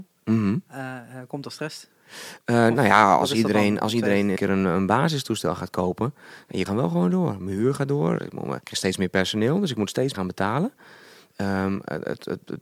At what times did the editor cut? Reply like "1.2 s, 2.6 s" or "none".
4.4 s, 6.7 s, 8.6 s, 10.1 s